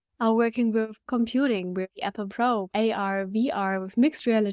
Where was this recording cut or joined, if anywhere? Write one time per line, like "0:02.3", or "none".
0:01.1
0:01.9
0:02.3
0:02.7